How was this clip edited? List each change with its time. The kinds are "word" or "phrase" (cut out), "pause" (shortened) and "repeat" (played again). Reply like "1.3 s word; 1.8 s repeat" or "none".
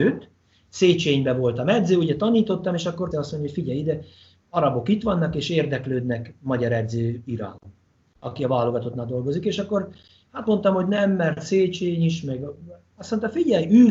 3.1 s word